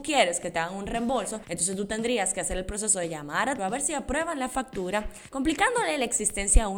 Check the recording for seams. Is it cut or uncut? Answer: cut